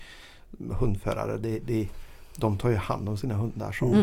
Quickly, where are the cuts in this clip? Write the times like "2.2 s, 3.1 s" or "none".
none

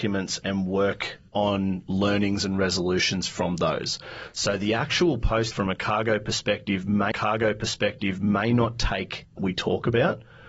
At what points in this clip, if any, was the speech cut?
1.3 s, 5.5 s, 7.1 s, 9.4 s

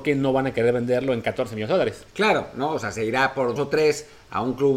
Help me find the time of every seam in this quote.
2.1 s, 3.6 s

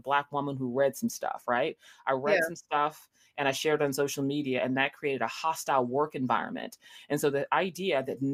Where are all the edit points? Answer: none

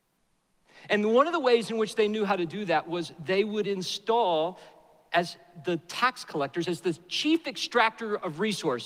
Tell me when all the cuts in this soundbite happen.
none

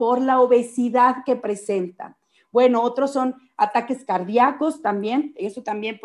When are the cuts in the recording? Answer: none

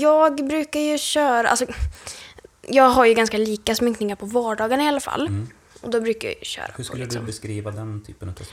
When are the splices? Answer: none

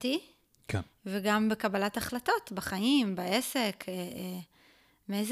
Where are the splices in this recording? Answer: none

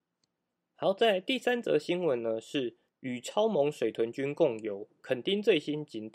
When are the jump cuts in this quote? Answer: 2.9 s

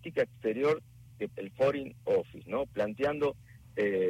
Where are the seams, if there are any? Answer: 1.3 s

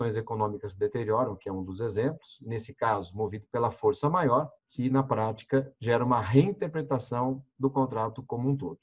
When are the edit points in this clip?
4.6 s

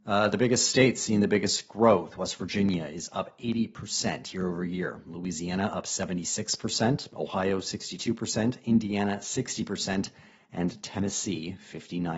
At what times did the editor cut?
none

